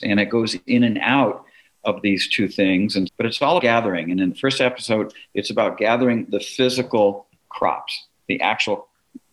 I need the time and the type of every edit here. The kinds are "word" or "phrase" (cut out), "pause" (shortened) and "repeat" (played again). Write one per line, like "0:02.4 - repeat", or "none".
0:03.1 - word
0:03.6 - word